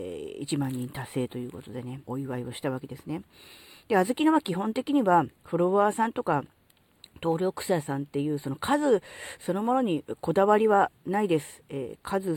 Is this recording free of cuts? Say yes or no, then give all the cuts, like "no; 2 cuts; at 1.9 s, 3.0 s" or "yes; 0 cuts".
no; 2 cuts; at 2.0 s, 5.4 s